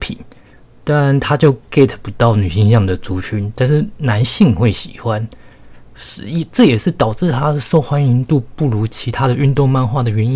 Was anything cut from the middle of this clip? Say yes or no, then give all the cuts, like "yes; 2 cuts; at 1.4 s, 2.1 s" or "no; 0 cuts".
no; 0 cuts